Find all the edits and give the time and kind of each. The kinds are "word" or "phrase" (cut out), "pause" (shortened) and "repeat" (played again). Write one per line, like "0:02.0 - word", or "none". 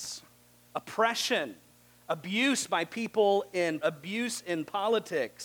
0:03.8 - word